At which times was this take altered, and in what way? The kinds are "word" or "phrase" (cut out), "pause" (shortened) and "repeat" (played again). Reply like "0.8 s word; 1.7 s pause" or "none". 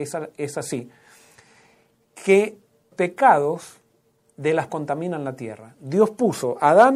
2.9 s word; 4.7 s word